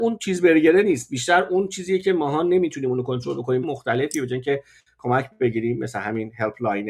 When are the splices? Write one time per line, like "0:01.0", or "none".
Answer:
0:03.6